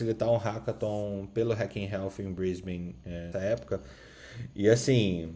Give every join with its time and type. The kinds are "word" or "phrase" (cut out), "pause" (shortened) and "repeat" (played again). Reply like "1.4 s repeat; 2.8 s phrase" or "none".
3.3 s word